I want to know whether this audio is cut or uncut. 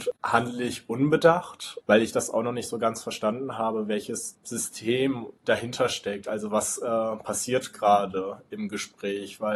cut